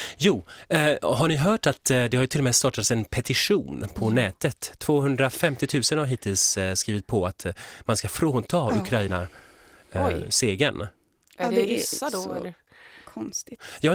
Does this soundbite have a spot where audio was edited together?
no; 0 cuts

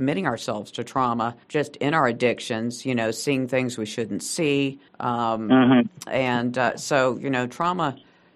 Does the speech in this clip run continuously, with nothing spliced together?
no; 2 cuts; at 1.4 s, 4.9 s

